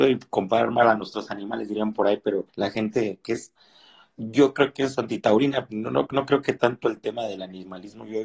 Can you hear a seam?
yes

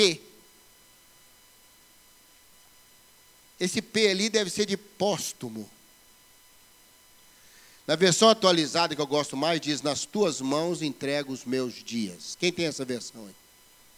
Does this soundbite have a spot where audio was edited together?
no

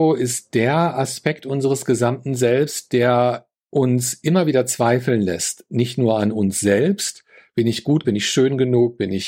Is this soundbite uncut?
no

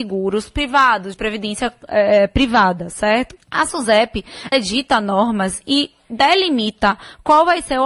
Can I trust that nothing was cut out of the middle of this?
no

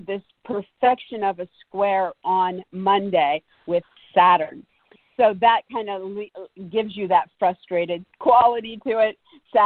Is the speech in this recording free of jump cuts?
yes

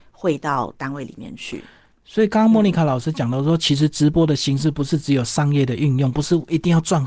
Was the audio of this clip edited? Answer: no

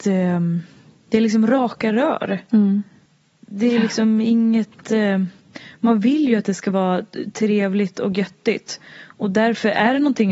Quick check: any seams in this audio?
yes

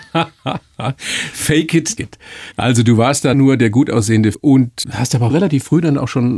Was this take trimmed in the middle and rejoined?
yes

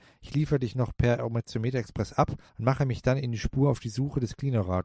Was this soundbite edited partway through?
no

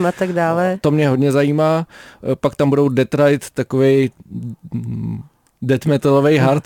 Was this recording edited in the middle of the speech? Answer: no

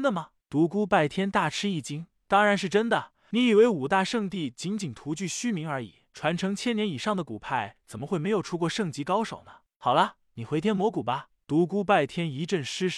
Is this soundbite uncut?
yes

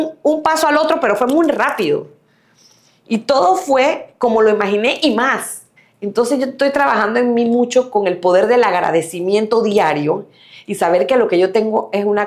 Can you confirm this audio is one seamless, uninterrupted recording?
no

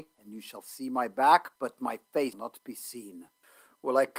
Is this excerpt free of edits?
no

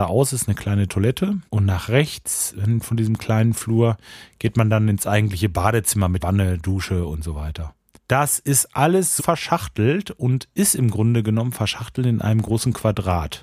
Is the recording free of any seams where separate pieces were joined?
no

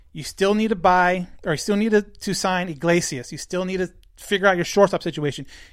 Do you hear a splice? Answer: no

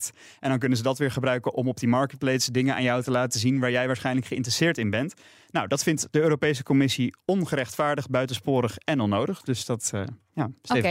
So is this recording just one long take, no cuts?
yes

